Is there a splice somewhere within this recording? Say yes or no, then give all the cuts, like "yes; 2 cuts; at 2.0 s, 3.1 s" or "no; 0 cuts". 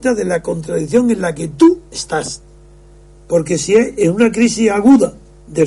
no; 0 cuts